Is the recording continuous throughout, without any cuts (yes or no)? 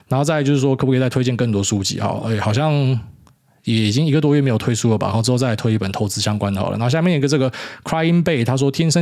yes